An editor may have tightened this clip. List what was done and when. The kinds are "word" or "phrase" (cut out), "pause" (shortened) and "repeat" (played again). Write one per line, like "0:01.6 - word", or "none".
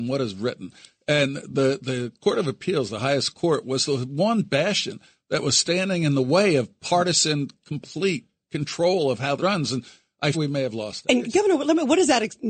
0:09.4 - word
0:10.3 - word